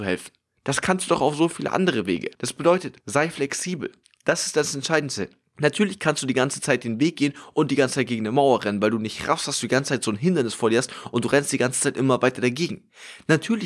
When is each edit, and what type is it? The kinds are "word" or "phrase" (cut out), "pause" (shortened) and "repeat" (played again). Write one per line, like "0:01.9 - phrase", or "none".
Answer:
0:02.3 - pause
0:03.0 - pause
0:04.0 - pause

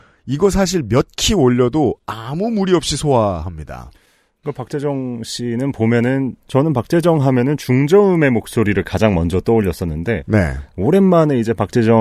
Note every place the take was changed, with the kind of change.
0:06.4 - pause

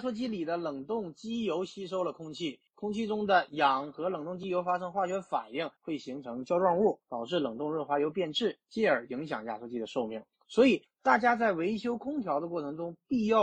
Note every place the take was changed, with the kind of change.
0:02.7 - pause
0:05.8 - pause
0:07.0 - pause
0:08.6 - pause
0:10.3 - pause

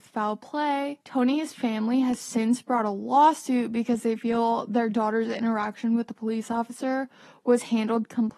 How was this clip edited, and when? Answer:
0:01.0 - pause

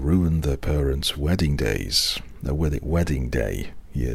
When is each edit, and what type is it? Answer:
none

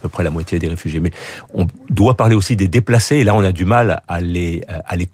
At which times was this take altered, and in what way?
none

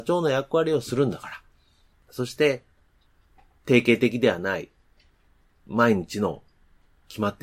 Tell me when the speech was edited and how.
none

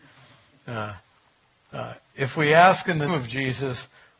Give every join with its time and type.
0:03.1 - word

